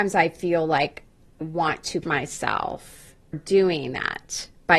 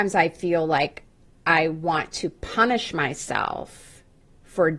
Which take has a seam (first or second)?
first